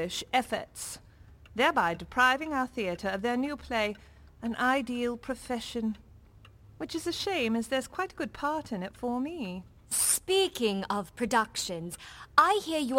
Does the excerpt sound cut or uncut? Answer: uncut